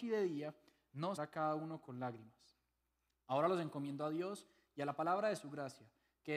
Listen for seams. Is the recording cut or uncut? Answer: cut